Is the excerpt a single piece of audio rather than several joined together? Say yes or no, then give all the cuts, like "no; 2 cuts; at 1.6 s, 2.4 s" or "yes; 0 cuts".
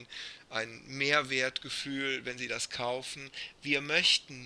yes; 0 cuts